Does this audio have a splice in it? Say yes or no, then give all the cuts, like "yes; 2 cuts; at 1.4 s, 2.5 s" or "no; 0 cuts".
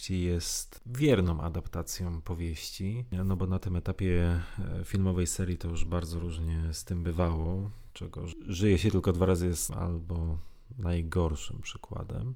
yes; 2 cuts; at 5.9 s, 9.7 s